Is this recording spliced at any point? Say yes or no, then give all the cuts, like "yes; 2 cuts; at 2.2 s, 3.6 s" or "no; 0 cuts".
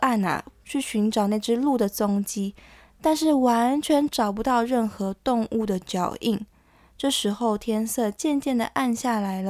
no; 0 cuts